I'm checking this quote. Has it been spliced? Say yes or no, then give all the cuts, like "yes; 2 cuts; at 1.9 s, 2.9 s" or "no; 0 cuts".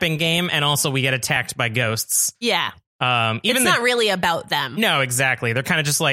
no; 0 cuts